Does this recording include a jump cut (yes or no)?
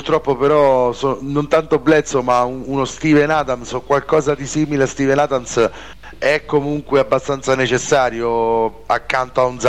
no